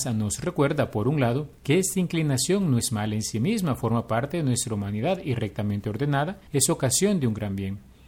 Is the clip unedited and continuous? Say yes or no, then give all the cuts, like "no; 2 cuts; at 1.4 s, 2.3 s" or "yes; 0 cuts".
no; 2 cuts; at 1.6 s, 6.5 s